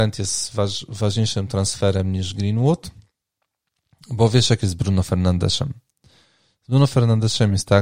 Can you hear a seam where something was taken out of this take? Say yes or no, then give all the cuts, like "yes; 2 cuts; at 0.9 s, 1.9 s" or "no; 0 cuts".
no; 0 cuts